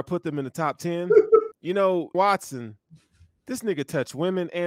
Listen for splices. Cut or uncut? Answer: cut